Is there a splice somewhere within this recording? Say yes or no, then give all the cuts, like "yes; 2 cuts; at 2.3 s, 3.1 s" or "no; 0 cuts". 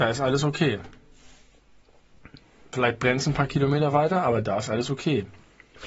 no; 0 cuts